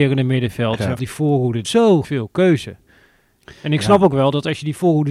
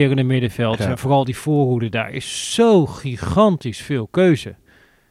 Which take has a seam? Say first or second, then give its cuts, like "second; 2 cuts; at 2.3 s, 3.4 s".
first; 3 cuts; at 1.0 s, 1.6 s, 2.0 s